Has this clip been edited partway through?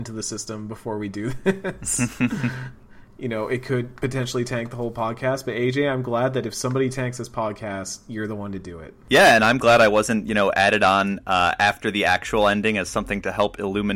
no; 0 cuts

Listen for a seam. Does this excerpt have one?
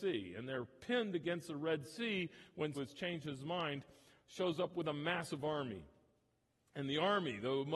yes; 1 cut; at 2.7 s

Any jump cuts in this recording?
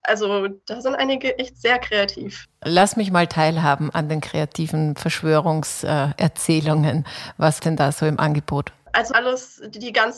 yes; 2 cuts; at 7.6 s, 9.1 s

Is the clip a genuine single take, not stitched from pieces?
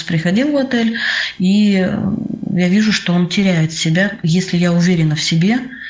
yes; 0 cuts

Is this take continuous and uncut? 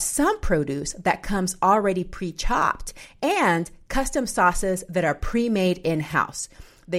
yes; 0 cuts

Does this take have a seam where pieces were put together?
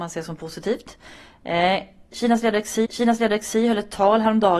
yes; 1 cut; at 2.8 s

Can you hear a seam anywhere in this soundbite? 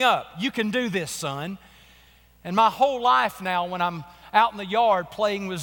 no; 0 cuts

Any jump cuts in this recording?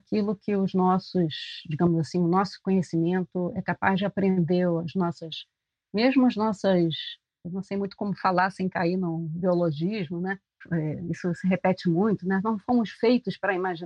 no; 0 cuts

